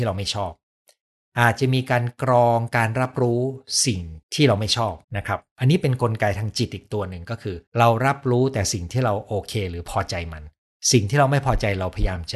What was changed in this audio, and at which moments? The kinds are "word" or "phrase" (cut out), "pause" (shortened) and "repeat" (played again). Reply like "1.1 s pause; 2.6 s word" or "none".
4.2 s pause; 5.0 s pause; 7.7 s pause